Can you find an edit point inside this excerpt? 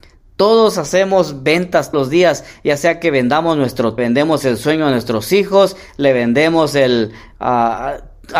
yes; 2 cuts; at 1.9 s, 4.0 s

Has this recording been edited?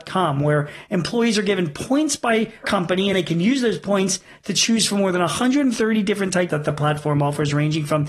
yes; 3 cuts; at 2.6 s, 3.1 s, 6.5 s

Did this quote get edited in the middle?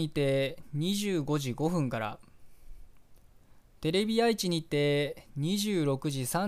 no; 0 cuts

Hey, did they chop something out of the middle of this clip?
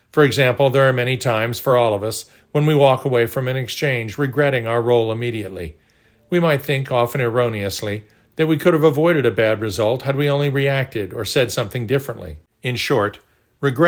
no; 0 cuts

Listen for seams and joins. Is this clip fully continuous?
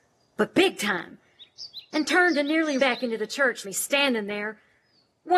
no; 2 cuts; at 2.8 s, 3.6 s

